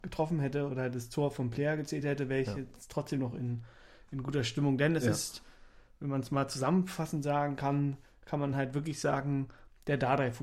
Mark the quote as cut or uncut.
uncut